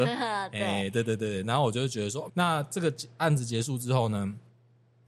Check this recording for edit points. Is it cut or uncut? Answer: cut